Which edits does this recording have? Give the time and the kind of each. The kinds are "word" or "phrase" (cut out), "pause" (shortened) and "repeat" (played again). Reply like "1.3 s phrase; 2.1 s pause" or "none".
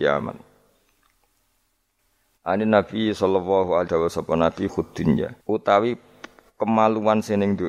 3.9 s phrase; 4.7 s word; 5.4 s pause